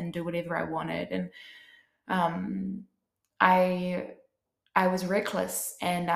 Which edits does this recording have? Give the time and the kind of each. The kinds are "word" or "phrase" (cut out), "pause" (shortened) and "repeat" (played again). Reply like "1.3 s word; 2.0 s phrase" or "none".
none